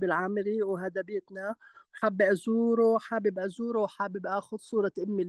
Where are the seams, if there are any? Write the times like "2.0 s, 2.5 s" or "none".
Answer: none